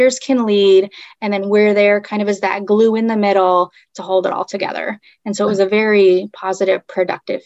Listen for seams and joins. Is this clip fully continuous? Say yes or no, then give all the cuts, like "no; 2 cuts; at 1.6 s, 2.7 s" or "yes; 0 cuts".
yes; 0 cuts